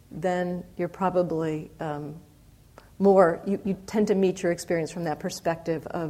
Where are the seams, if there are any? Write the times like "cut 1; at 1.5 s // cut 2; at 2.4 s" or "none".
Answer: none

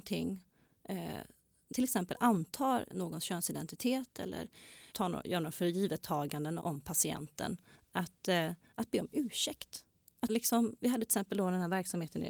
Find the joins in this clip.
cut 1; at 1.7 s // cut 2; at 2.9 s // cut 3; at 4.9 s // cut 4; at 6.6 s // cut 5; at 7.7 s // cut 6; at 10.3 s // cut 7; at 10.8 s

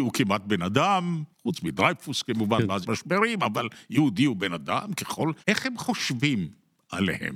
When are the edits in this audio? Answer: cut 1; at 1.3 s // cut 2; at 2.8 s // cut 3; at 5.4 s

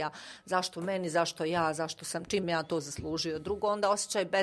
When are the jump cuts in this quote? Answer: cut 1; at 2.4 s

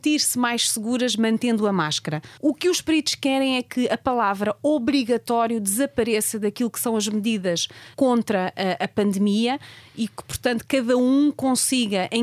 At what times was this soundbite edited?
cut 1; at 2.4 s // cut 2; at 7.9 s

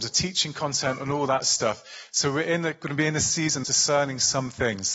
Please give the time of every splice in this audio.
cut 1; at 3.6 s

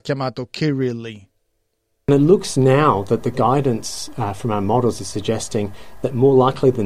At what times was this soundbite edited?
none

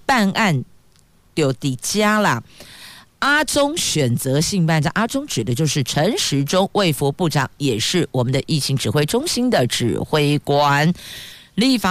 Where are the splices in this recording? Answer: none

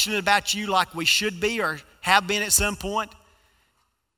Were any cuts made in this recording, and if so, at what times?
none

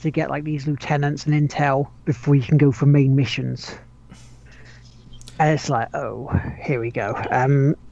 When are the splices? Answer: cut 1; at 2.0 s

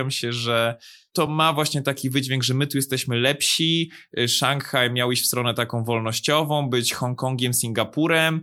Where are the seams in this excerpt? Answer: none

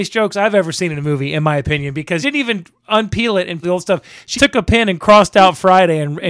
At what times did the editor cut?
cut 1; at 2.2 s // cut 2; at 3.6 s // cut 3; at 4.3 s

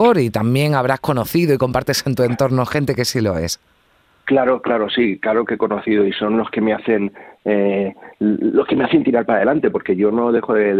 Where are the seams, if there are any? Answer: none

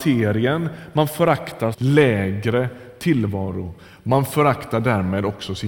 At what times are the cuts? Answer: cut 1; at 1.7 s

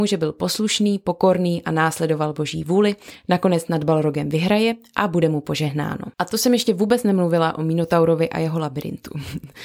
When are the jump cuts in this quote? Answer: cut 1; at 6.1 s

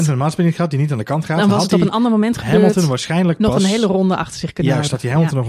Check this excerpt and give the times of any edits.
none

